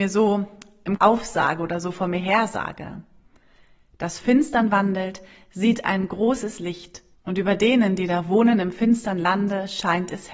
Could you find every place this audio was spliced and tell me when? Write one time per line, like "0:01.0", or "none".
0:01.0
0:04.2
0:07.1